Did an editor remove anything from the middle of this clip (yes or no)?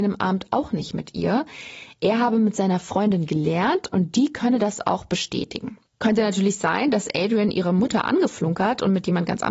yes